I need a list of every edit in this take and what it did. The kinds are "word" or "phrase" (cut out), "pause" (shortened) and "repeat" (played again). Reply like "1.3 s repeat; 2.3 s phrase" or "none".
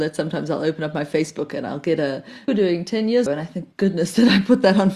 2.5 s phrase; 3.3 s word; 3.7 s pause

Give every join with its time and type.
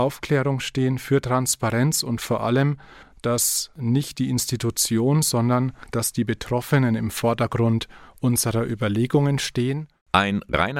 none

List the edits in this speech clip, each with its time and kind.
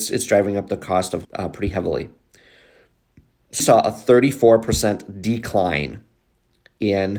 1.2 s word; 3.6 s word

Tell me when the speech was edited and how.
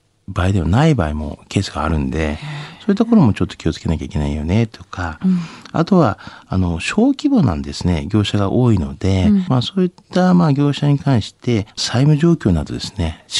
9.5 s phrase; 11.7 s pause

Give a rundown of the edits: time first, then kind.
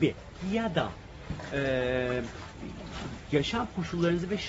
none

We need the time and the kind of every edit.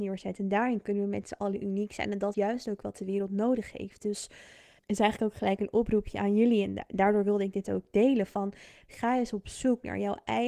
2.3 s word; 4.8 s word

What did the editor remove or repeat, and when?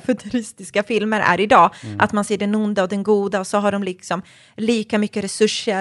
none

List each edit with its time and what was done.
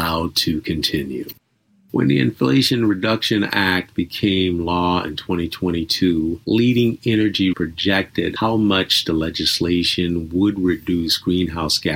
7.5 s phrase

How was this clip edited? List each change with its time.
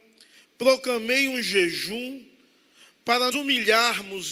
3.3 s word

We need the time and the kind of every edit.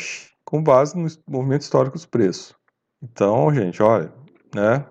2.9 s pause

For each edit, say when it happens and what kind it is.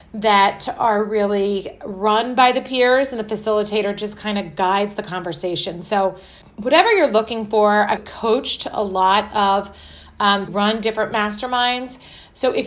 6.4 s pause; 8.0 s word; 10.5 s phrase

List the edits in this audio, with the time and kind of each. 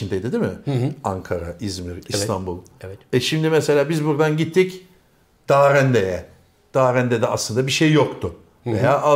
none

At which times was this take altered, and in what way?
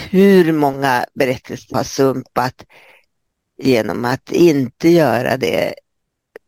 1.7 s word

